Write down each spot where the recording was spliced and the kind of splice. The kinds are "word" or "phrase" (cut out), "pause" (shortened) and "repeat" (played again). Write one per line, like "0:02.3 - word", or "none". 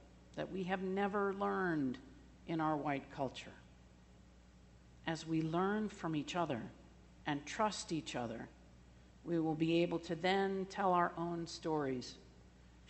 none